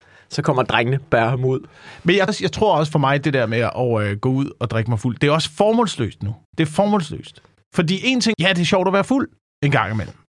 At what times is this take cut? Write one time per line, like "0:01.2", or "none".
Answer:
0:02.3
0:06.4
0:08.3